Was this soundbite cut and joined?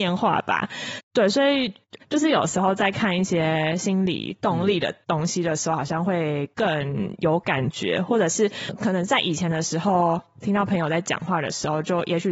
yes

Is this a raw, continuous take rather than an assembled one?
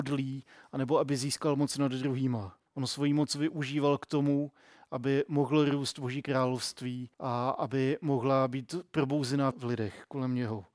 no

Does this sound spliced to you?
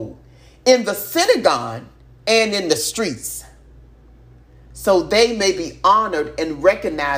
no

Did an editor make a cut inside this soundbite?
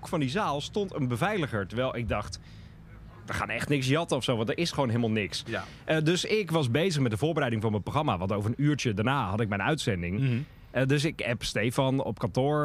no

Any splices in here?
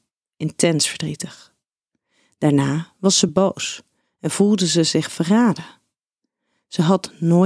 no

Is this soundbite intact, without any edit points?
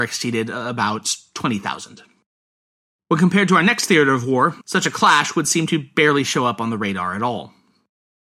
no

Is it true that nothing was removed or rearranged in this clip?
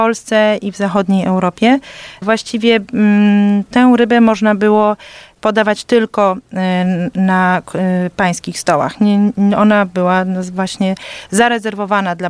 yes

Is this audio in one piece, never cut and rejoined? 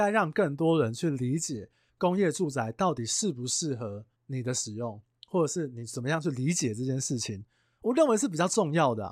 yes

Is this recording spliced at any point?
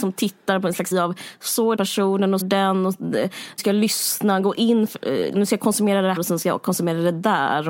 yes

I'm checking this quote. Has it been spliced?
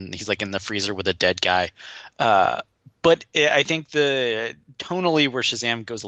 no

